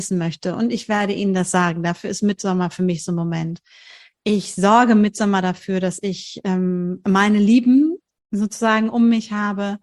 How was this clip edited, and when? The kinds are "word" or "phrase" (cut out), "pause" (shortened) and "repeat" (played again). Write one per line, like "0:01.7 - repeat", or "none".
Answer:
none